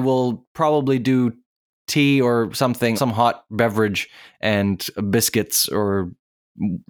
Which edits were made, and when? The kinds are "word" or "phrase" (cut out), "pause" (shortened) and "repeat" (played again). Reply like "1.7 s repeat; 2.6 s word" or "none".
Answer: 3.0 s word